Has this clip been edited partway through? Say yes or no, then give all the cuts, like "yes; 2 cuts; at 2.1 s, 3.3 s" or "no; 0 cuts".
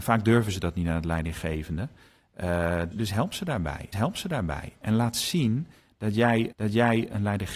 yes; 3 cuts; at 2.9 s, 3.9 s, 6.5 s